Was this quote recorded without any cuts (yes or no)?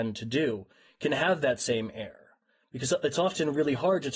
yes